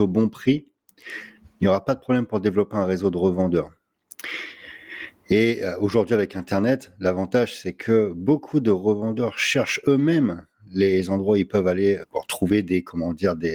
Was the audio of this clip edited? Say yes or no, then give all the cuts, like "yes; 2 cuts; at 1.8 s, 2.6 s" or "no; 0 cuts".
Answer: yes; 1 cut; at 12.0 s